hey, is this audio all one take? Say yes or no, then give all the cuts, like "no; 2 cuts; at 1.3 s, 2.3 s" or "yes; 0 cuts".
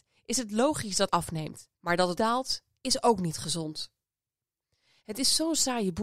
no; 3 cuts; at 1.1 s, 1.7 s, 2.2 s